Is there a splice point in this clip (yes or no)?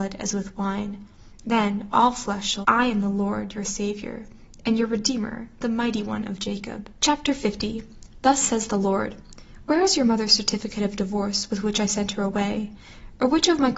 yes